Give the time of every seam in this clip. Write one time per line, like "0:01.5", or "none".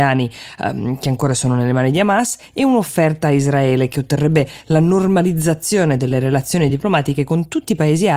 none